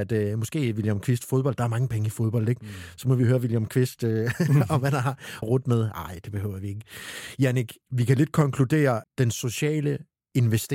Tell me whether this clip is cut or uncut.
cut